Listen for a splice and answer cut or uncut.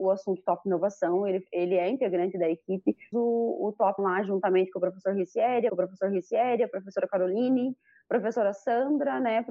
cut